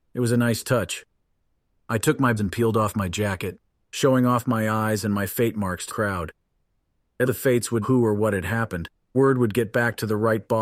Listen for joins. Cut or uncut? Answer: cut